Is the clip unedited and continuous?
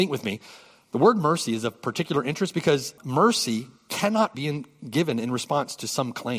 no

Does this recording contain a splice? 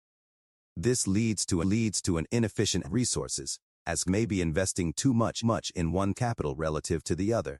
yes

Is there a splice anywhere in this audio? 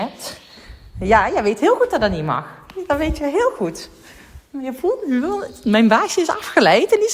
no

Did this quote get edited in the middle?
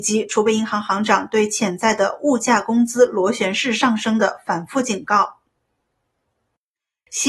no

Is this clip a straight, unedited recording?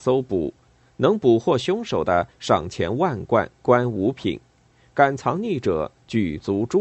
yes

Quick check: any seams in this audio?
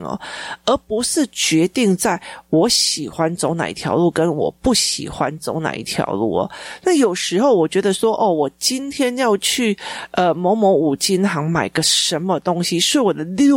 no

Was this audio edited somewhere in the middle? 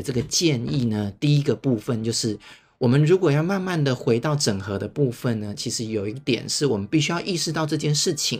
no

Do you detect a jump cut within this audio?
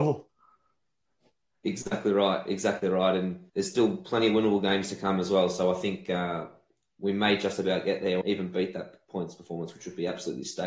yes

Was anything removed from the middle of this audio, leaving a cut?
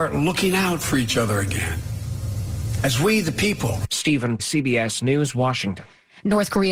yes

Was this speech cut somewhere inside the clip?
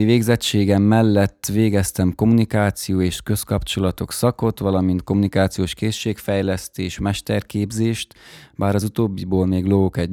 no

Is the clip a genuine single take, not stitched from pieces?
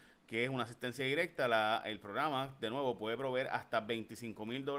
yes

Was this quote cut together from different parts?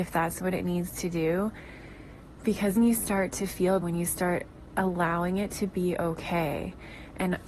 yes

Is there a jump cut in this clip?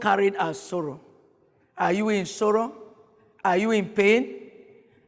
no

